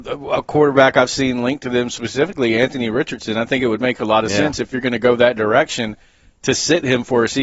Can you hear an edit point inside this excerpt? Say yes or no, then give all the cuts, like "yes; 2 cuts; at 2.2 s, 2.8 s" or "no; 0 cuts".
no; 0 cuts